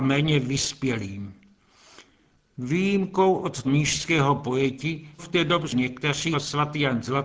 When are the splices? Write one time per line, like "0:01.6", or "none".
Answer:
0:03.6
0:05.2
0:06.3

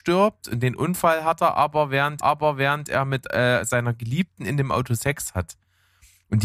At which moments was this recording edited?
0:02.2

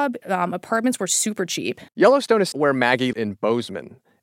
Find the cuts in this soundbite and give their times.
0:01.9
0:02.5
0:03.1

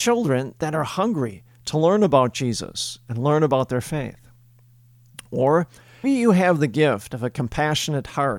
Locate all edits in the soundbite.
0:06.0

